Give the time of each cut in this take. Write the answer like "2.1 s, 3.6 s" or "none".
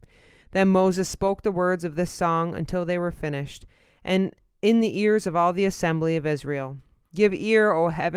none

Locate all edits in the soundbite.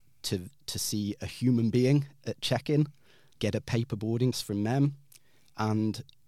3.4 s, 4.3 s

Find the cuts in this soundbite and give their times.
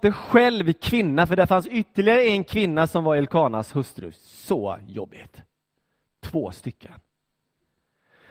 none

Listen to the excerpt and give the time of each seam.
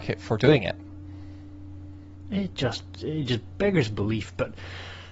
none

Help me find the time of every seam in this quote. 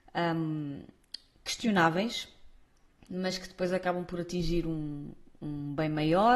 none

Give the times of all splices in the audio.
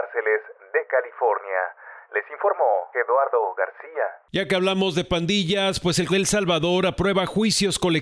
2.9 s, 6.1 s

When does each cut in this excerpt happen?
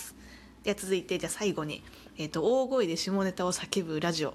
none

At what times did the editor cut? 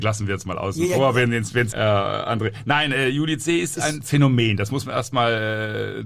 1.7 s

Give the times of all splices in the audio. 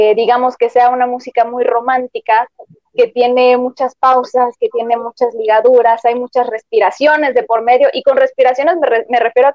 none

